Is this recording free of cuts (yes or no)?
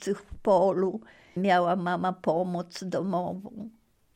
no